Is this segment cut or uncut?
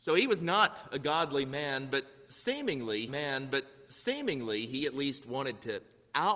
cut